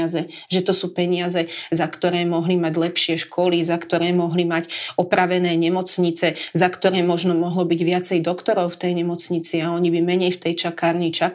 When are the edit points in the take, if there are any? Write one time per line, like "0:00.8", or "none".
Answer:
none